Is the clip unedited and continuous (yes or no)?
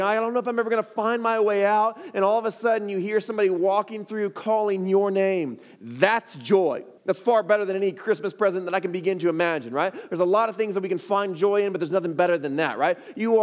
no